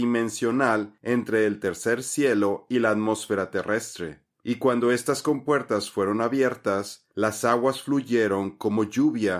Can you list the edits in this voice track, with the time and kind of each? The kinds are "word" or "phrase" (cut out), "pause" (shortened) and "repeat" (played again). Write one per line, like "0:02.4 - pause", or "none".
none